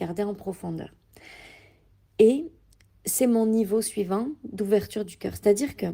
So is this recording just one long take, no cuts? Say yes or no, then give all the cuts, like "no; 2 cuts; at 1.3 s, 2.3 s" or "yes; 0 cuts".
yes; 0 cuts